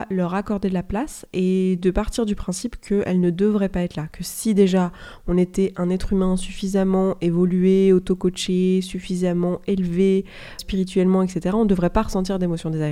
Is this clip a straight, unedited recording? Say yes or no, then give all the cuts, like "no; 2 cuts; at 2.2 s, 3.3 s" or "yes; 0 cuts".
no; 1 cut; at 10.6 s